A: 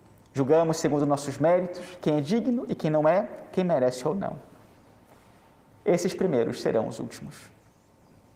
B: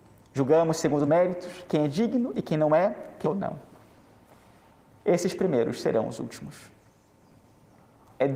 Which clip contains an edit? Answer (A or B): B